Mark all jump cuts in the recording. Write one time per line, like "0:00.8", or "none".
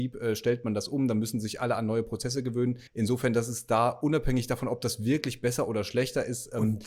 0:02.9